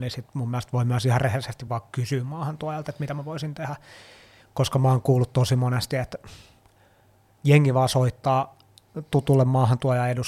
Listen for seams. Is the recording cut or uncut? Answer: uncut